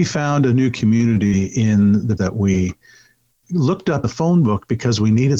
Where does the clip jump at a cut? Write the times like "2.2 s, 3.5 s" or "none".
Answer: 2.2 s, 3.4 s, 4.0 s